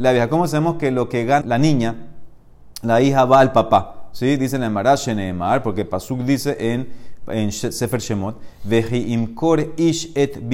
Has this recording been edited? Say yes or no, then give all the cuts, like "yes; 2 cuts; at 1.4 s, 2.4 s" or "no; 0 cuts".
yes; 1 cut; at 1.4 s